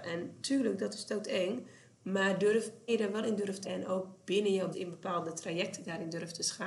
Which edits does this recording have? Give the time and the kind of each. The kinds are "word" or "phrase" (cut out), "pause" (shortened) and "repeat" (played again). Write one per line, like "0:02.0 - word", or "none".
0:02.9 - word
0:03.6 - word
0:04.7 - word